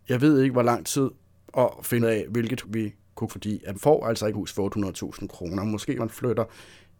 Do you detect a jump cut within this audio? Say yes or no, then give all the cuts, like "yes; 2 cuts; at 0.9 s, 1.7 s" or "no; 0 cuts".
yes; 6 cuts; at 2.0 s, 2.6 s, 3.3 s, 3.7 s, 4.3 s, 6.0 s